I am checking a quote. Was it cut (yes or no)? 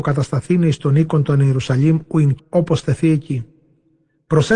yes